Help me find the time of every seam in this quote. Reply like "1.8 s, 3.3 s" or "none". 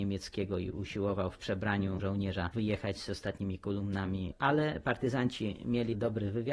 2.0 s